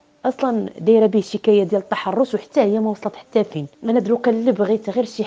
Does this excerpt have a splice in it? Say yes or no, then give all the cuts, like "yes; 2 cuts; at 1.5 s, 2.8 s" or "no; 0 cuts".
yes; 1 cut; at 3.7 s